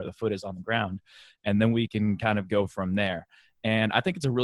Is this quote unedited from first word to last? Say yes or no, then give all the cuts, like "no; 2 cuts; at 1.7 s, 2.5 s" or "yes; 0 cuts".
yes; 0 cuts